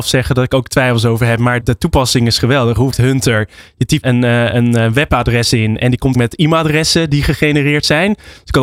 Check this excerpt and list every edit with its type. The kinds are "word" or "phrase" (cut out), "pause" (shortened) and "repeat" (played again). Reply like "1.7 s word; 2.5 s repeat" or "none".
1.6 s word; 2.9 s word; 4.0 s word; 6.1 s word